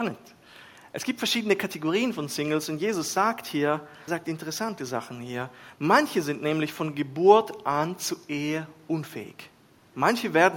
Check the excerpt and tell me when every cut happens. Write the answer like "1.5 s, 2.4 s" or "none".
4.1 s